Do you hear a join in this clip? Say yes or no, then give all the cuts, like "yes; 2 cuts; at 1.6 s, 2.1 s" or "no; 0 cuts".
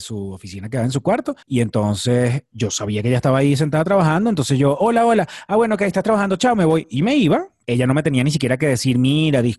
yes; 2 cuts; at 1.4 s, 7.6 s